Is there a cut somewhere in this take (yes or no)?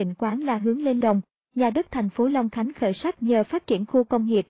yes